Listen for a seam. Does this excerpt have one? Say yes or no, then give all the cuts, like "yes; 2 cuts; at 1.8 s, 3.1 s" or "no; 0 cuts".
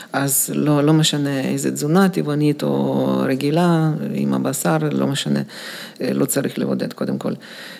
no; 0 cuts